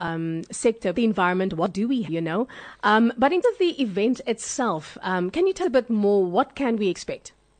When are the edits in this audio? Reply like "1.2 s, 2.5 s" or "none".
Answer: 0.9 s, 2.1 s, 3.4 s, 5.6 s